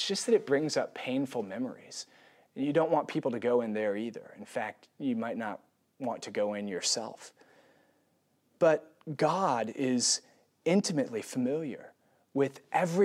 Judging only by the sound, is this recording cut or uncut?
uncut